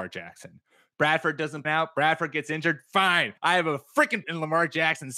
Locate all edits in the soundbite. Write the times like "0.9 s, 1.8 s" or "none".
1.6 s, 3.4 s, 4.2 s